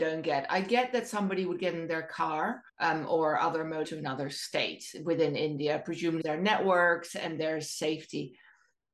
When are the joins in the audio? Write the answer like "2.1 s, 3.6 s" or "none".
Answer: 2.7 s, 3.8 s, 6.2 s

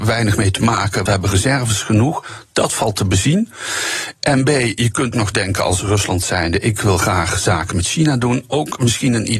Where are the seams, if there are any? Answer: 1.1 s, 5.1 s

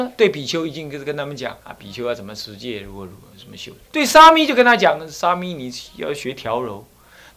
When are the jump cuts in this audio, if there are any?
1.6 s, 3.3 s, 3.8 s

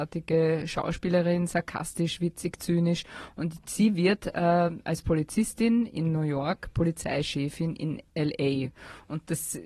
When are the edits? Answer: 8.1 s

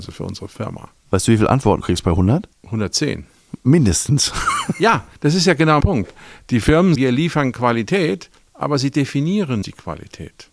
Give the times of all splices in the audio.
1.0 s, 1.8 s, 2.5 s, 5.2 s, 5.8 s, 6.9 s, 9.6 s

